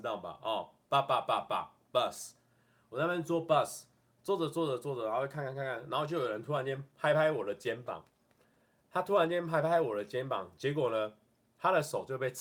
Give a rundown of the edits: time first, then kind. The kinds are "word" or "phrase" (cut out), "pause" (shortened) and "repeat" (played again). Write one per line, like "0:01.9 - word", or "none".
none